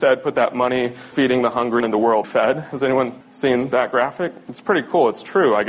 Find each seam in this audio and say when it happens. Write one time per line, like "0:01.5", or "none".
0:01.1
0:01.8
0:02.2
0:03.2